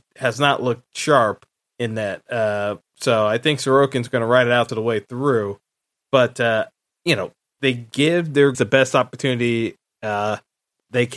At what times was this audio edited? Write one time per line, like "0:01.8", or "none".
0:01.6
0:04.7
0:08.5